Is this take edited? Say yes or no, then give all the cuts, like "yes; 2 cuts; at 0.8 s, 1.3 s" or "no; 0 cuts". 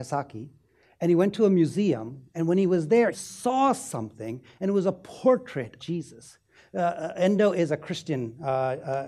yes; 2 cuts; at 3.1 s, 5.8 s